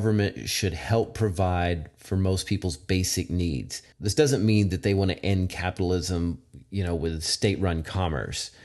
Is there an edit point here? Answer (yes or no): yes